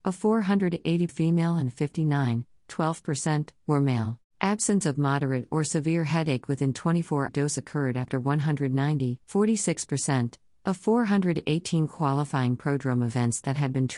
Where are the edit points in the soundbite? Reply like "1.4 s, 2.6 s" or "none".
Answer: 1.1 s, 4.2 s, 7.3 s, 9.2 s